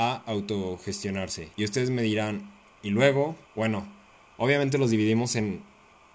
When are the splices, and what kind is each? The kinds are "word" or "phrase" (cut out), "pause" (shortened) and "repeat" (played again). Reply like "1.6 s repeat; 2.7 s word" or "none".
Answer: 1.5 s pause; 2.7 s pause; 3.4 s pause